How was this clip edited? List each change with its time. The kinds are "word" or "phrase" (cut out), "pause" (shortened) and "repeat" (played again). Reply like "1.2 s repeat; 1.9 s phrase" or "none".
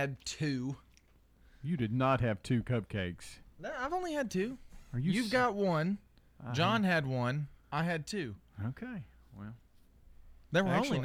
7.6 s pause